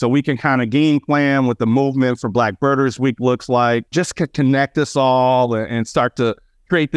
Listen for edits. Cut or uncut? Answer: cut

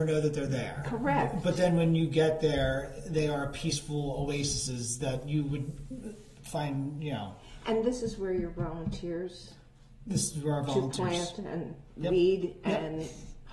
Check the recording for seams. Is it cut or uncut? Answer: uncut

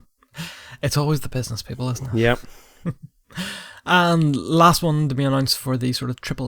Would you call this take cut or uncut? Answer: uncut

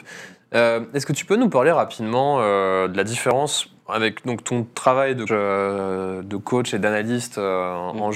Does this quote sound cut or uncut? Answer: cut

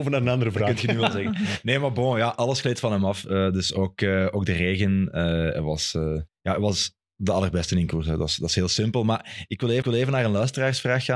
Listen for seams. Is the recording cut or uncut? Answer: cut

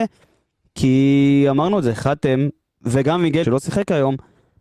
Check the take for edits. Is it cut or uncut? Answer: cut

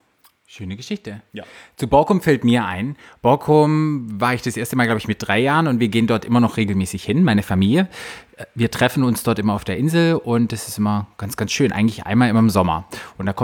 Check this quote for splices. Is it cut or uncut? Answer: uncut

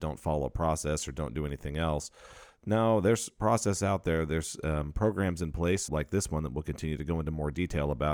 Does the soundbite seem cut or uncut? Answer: cut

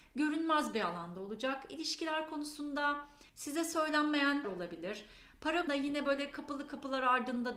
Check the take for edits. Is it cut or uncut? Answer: cut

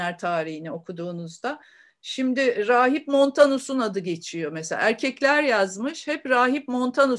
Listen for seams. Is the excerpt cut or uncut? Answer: uncut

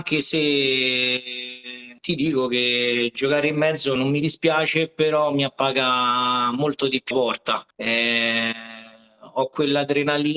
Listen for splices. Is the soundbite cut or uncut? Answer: cut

